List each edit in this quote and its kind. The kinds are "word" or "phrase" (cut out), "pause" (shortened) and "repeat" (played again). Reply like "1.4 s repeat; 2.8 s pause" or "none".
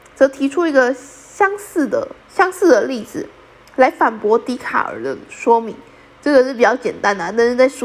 2.2 s pause